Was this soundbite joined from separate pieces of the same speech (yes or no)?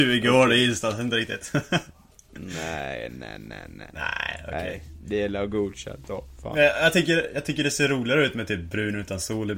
yes